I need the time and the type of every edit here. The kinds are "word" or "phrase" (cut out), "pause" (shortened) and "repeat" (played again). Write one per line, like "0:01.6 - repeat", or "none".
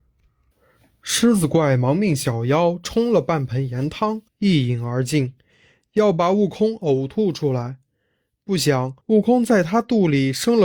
0:04.3 - pause
0:09.0 - pause